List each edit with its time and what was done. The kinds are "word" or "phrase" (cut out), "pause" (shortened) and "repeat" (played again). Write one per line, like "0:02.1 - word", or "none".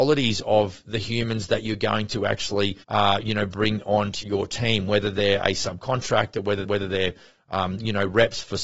0:02.8 - pause
0:04.2 - word
0:06.6 - repeat